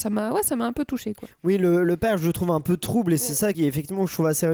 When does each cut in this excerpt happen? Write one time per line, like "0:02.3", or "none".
0:03.5